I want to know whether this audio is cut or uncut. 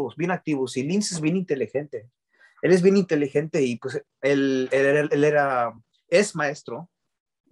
uncut